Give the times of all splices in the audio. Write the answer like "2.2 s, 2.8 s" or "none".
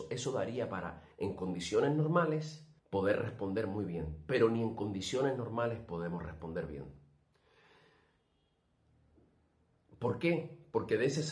1.1 s, 2.8 s